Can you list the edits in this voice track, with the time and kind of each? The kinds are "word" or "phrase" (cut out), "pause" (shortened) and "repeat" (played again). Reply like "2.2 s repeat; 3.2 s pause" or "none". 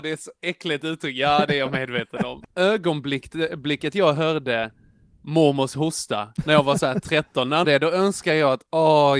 7.6 s phrase